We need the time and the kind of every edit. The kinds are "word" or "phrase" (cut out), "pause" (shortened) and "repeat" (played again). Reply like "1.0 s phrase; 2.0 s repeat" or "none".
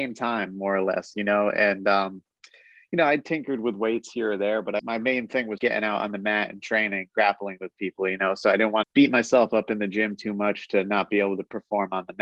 4.8 s word; 5.6 s word; 8.8 s word